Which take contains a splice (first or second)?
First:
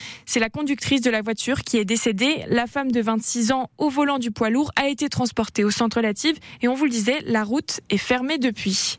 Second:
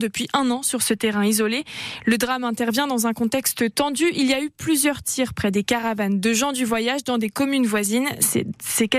first